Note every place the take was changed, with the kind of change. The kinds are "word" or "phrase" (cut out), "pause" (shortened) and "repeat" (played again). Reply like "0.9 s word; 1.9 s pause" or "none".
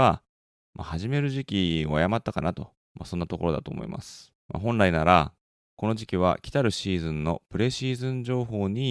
2.8 s pause; 4.4 s pause

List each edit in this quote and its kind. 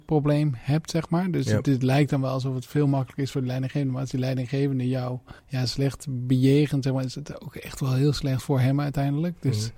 5.4 s pause

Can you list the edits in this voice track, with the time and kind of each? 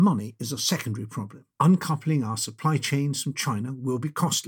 1.5 s pause

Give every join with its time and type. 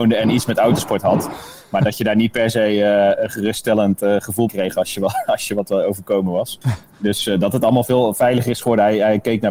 4.5 s word

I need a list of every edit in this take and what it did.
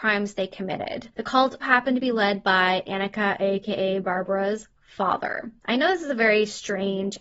1.1 s pause; 1.6 s word; 5.6 s pause

